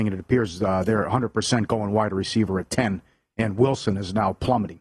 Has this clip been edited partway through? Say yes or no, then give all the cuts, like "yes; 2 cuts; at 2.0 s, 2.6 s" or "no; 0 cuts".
no; 0 cuts